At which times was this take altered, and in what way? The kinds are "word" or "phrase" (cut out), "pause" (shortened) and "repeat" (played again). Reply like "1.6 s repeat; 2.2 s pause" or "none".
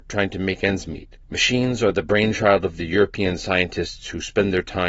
1.2 s pause

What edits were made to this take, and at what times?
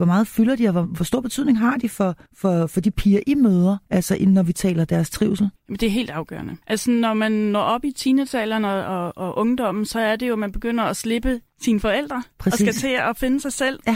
2.3 s pause; 3.8 s pause; 4.9 s word; 5.6 s pause; 6.6 s pause; 11.5 s pause

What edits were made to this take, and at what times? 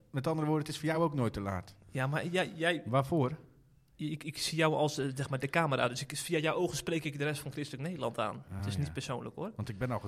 none

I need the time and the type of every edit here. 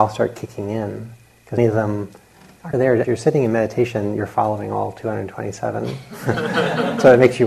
1.6 s word; 2.7 s word; 3.0 s word

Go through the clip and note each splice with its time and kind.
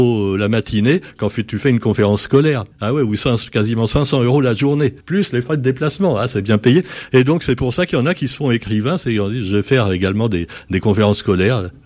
2.7 s pause; 5.0 s pause

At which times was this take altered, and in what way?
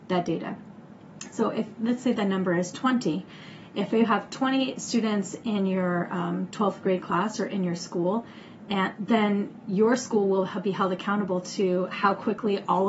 none

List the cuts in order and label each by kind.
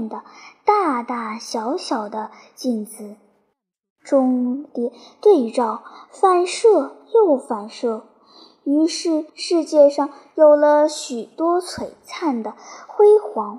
9.3 s pause

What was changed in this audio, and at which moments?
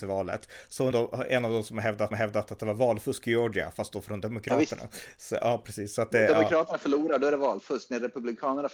0.9 s word; 2.1 s repeat

